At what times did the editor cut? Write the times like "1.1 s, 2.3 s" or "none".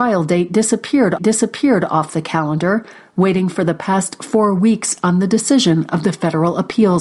1.2 s